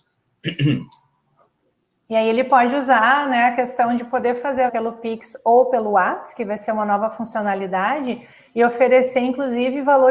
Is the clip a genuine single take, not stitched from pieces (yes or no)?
no